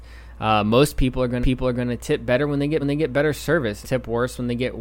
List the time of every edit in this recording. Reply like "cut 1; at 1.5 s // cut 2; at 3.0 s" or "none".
cut 1; at 1.4 s // cut 2; at 2.8 s // cut 3; at 3.8 s